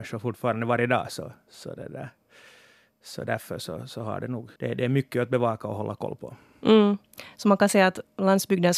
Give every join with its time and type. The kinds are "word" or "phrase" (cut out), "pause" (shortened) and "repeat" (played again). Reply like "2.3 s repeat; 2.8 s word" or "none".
4.6 s pause